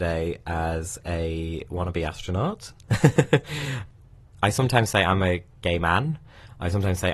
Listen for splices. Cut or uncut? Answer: uncut